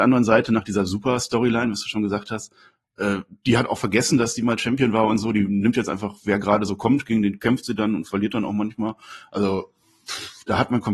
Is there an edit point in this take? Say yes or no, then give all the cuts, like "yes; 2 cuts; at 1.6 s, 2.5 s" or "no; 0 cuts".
yes; 1 cut; at 3.8 s